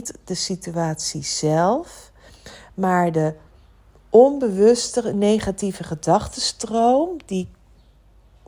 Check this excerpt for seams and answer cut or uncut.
uncut